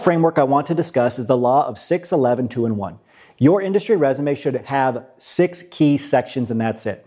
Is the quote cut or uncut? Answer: uncut